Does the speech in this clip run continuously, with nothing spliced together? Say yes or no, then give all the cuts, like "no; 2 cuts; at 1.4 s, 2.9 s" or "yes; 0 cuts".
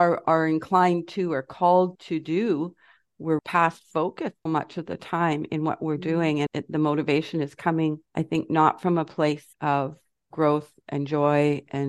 no; 6 cuts; at 1.9 s, 3.4 s, 4.5 s, 6.5 s, 8.1 s, 9.5 s